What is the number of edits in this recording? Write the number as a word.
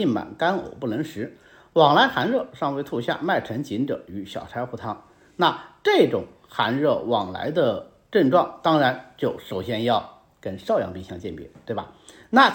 zero